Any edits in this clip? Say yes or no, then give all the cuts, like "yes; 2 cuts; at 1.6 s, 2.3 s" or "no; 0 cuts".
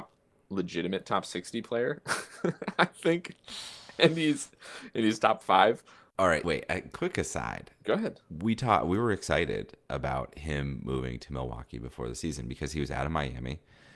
yes; 1 cut; at 6.4 s